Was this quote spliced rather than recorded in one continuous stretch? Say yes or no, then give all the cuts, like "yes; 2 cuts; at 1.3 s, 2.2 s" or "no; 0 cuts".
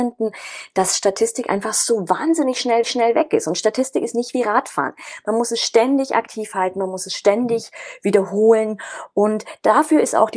yes; 1 cut; at 2.8 s